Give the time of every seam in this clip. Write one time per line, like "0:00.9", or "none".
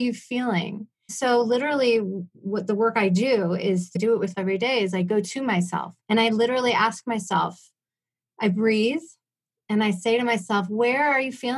0:01.1
0:02.3
0:04.0
0:04.3
0:06.0

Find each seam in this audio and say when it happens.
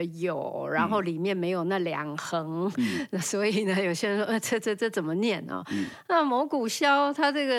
none

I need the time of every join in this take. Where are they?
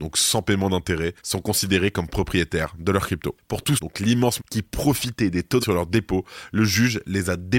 0:01.2
0:03.8
0:04.4
0:05.6

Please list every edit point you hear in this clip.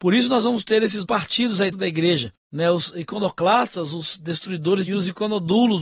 0:01.0
0:01.7
0:02.4
0:04.9

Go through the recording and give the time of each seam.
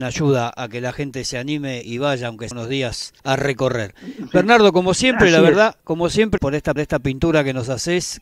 0:01.8
0:02.5
0:03.2
0:05.8
0:06.4
0:06.8

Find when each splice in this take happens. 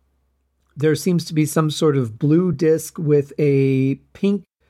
none

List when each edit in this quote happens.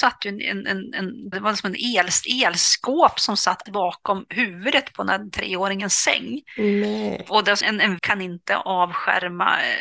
0:01.3
0:03.7
0:07.6
0:08.0

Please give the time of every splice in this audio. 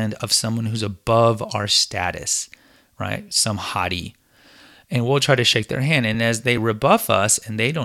none

